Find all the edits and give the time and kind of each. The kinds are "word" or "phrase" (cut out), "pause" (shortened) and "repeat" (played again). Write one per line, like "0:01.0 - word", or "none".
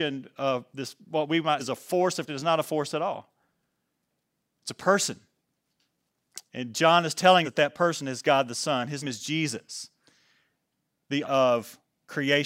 0:01.6 - word
0:02.3 - word
0:07.4 - word
0:09.0 - word
0:11.2 - word